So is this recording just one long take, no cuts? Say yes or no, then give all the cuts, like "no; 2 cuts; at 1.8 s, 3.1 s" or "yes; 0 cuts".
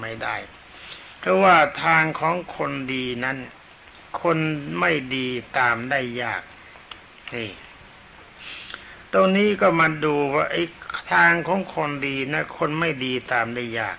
no; 1 cut; at 9.1 s